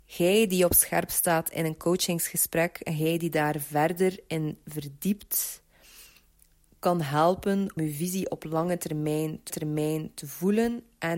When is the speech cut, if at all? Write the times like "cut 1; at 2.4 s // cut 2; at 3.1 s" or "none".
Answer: cut 1; at 7.8 s // cut 2; at 9.5 s